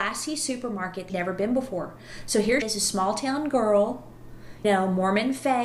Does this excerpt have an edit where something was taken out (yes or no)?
yes